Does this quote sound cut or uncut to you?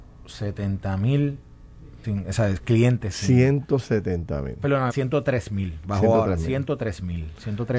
cut